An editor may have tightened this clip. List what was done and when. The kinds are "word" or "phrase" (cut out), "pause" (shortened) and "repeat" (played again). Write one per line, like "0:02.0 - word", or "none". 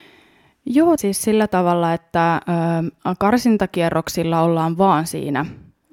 0:01.0 - phrase